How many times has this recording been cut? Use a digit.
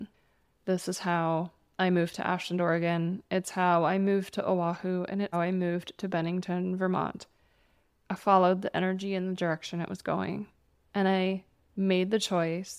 1